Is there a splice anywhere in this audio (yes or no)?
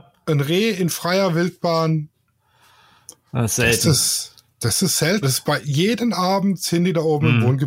yes